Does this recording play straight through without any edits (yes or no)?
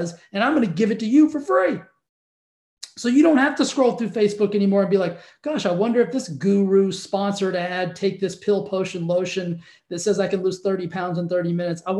yes